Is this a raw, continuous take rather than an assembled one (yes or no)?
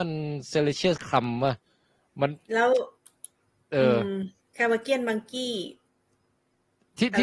no